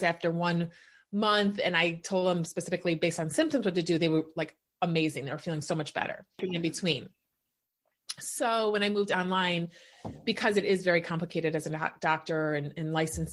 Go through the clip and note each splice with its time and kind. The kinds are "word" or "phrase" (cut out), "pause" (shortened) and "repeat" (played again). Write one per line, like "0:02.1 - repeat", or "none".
none